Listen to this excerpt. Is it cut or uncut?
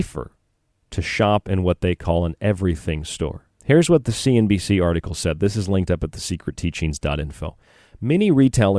cut